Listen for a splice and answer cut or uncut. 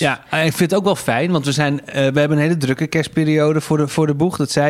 uncut